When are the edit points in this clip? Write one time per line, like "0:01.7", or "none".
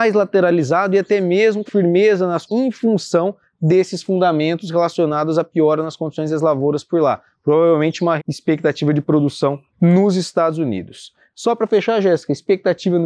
0:01.7
0:02.5
0:08.2
0:09.7